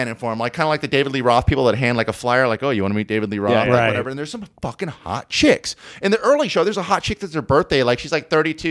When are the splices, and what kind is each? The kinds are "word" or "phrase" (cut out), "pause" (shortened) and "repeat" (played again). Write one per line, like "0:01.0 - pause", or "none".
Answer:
none